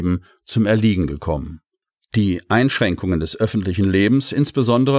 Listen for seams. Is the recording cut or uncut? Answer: uncut